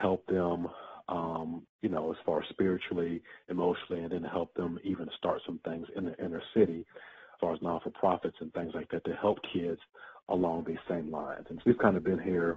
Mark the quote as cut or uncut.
cut